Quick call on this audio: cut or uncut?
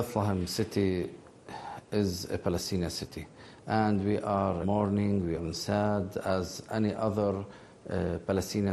cut